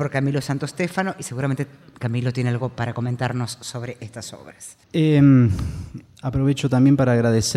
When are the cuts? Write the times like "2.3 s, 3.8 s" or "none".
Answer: 4.8 s